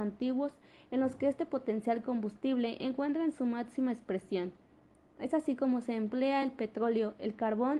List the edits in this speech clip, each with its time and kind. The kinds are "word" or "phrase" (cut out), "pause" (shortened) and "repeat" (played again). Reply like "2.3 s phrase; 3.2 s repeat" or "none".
none